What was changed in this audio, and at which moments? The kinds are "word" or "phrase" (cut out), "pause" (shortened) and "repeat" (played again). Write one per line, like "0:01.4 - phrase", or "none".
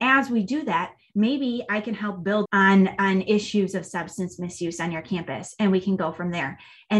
0:02.5 - word